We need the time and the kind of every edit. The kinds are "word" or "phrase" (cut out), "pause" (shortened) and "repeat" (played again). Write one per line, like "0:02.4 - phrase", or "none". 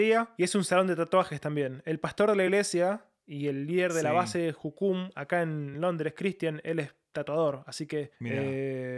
none